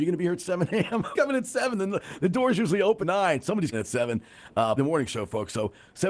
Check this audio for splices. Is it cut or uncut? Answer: cut